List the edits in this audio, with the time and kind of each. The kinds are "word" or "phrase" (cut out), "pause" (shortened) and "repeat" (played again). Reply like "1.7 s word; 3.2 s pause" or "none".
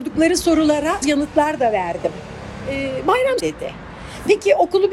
1.0 s word; 3.4 s phrase